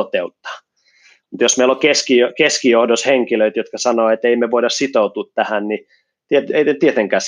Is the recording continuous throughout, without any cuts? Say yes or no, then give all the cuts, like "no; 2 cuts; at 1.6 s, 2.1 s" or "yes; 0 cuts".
yes; 0 cuts